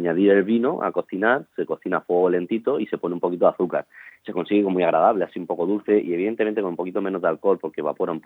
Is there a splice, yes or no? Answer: yes